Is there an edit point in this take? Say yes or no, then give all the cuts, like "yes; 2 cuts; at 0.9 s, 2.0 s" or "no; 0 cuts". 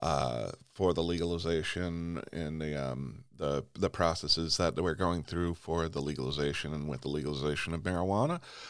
no; 0 cuts